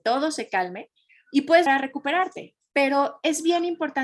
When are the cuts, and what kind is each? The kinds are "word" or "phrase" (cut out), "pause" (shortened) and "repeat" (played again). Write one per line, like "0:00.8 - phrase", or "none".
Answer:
0:01.7 - word